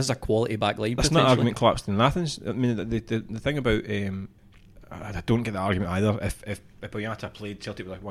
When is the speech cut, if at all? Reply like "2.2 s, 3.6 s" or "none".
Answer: none